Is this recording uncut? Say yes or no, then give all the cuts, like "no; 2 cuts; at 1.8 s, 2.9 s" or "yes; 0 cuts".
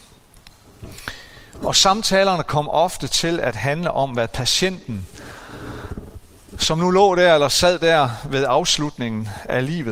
yes; 0 cuts